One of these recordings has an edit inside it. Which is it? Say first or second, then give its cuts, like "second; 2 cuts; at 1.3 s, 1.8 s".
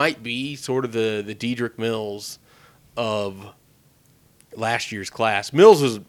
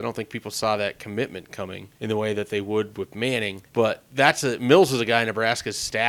second; 2 cuts; at 1.9 s, 3.7 s